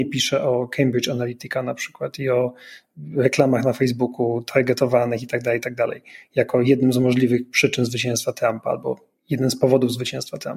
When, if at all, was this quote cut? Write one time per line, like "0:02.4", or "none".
none